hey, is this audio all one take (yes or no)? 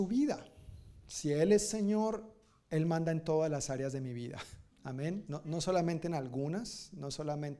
no